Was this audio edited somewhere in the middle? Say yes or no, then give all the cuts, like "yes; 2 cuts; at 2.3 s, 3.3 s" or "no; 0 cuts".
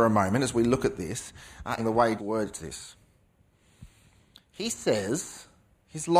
yes; 2 cuts; at 1.8 s, 2.2 s